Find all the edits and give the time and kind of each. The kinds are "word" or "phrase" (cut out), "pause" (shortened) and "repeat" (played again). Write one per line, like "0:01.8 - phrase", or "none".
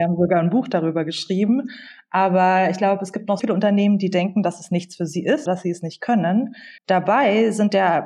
0:03.4 - word
0:05.5 - word
0:06.8 - pause